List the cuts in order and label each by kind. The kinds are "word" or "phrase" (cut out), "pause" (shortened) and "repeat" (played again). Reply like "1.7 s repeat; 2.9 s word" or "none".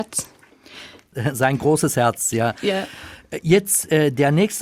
none